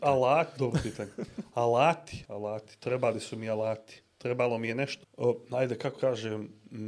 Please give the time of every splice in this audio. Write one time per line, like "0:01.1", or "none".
0:02.2
0:05.0
0:06.0